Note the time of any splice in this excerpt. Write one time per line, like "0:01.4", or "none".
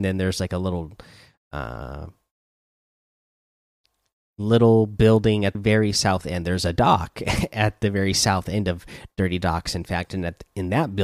0:05.5